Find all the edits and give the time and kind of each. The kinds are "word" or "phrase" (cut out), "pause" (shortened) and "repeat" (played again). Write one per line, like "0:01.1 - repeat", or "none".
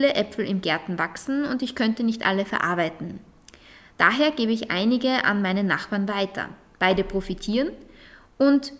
none